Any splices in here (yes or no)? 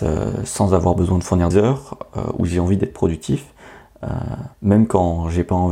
yes